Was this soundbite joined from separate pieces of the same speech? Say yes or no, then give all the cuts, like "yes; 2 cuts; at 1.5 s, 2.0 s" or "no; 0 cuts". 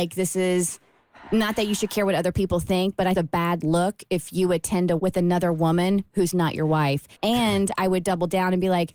yes; 3 cuts; at 3.2 s, 5.0 s, 7.1 s